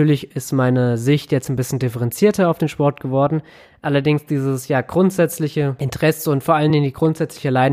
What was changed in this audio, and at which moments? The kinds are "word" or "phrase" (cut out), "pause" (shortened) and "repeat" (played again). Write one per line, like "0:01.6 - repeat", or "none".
none

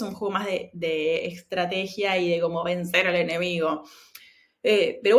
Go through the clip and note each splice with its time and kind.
none

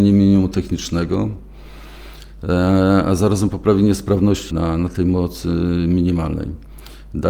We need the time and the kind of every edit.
0:04.5 - word

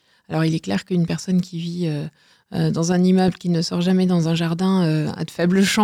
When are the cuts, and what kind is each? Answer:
none

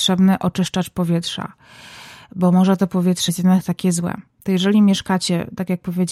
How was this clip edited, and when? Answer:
0:03.3 - word

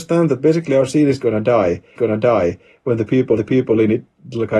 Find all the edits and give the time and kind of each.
0:02.0 - repeat
0:03.4 - repeat

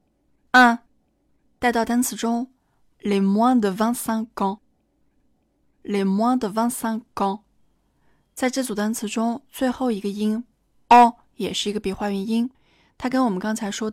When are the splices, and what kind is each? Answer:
none

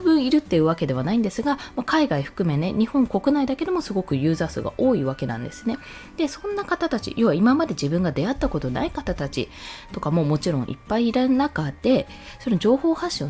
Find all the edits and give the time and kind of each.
none

